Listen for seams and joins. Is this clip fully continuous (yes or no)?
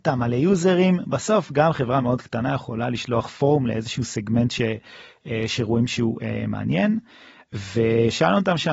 yes